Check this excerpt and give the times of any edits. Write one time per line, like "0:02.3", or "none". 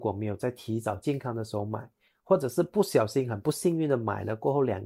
none